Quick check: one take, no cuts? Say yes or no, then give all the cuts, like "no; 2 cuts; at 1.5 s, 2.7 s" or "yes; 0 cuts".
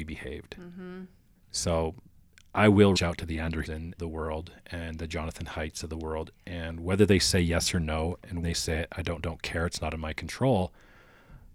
no; 6 cuts; at 1.3 s, 3.0 s, 3.7 s, 4.0 s, 8.4 s, 9.2 s